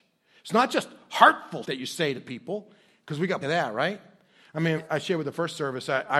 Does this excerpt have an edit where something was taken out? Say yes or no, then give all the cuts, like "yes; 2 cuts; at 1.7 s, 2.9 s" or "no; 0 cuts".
yes; 3 cuts; at 1.6 s, 3.4 s, 4.8 s